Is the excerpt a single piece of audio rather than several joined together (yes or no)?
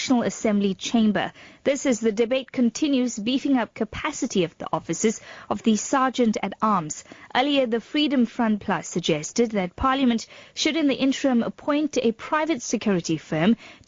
yes